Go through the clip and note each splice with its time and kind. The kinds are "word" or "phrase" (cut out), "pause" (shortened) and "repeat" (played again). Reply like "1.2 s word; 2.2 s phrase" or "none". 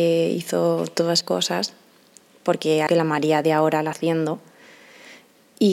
1.2 s word; 2.9 s word; 3.9 s word